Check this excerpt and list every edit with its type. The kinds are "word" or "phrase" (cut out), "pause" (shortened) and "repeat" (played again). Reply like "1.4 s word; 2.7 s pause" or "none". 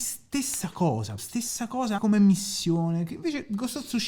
1.2 s word; 2.0 s word